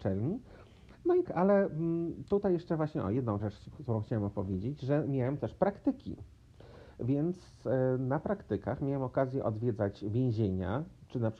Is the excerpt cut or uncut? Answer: cut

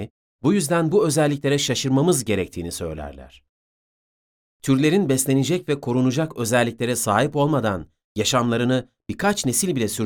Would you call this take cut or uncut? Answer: uncut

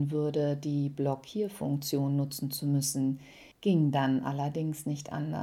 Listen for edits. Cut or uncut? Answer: cut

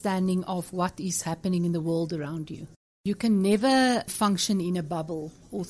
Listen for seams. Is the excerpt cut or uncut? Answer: uncut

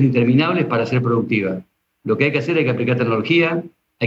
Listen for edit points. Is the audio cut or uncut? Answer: uncut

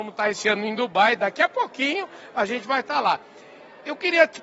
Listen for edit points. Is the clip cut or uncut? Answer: uncut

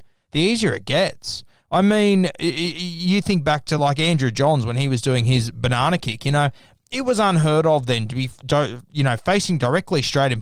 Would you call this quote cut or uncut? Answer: uncut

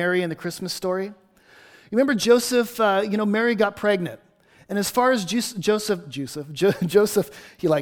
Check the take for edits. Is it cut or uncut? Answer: uncut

